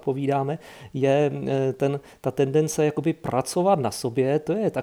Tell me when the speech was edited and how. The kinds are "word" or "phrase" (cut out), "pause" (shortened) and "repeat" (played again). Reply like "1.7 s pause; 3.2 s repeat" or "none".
none